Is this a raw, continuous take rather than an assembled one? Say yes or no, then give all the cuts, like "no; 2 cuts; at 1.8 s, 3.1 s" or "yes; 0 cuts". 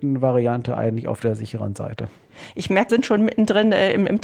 no; 1 cut; at 2.9 s